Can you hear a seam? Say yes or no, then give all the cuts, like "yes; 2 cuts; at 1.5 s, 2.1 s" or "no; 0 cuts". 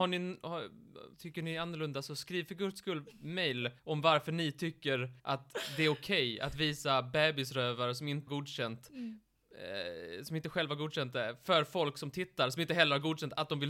yes; 4 cuts; at 1.1 s, 3.8 s, 5.2 s, 8.3 s